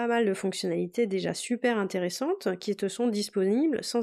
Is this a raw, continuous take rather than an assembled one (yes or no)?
yes